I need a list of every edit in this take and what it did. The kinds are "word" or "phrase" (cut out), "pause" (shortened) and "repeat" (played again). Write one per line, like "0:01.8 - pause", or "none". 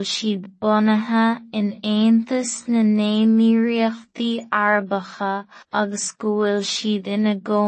0:05.6 - pause